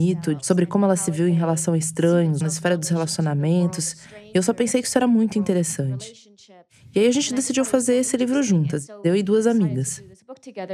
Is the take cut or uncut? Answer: uncut